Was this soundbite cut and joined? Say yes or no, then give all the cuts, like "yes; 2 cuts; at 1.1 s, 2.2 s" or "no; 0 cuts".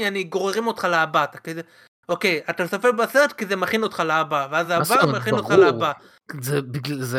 no; 0 cuts